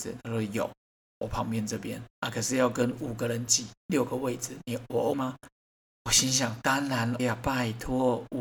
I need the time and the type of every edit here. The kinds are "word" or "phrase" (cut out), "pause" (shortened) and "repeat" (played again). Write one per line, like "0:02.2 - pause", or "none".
0:01.0 - pause
0:02.1 - pause
0:03.8 - pause
0:05.1 - word
0:07.2 - word